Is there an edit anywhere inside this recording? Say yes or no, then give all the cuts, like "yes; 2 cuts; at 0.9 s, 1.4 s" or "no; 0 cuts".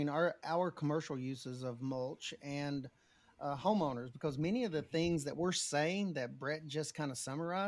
no; 0 cuts